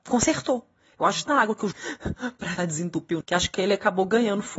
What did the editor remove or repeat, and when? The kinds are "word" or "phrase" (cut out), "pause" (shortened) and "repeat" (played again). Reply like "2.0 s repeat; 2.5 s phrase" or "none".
1.3 s word; 1.7 s word; 2.6 s word; 3.2 s word